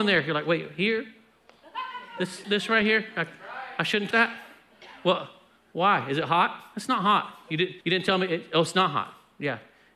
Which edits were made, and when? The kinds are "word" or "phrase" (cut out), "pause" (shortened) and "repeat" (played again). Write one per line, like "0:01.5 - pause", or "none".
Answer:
0:02.4 - word
0:04.1 - word
0:07.8 - pause